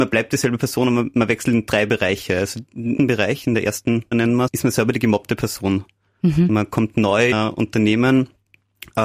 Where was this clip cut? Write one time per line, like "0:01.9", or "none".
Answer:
0:03.0
0:04.1
0:04.5
0:07.3